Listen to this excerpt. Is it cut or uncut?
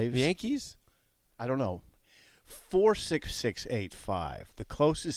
cut